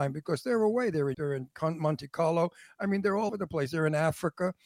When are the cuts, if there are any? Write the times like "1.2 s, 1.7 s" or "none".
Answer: 1.1 s, 3.3 s